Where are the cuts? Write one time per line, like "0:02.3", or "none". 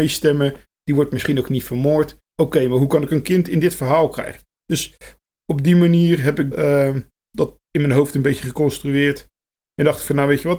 0:02.3
0:06.5
0:07.2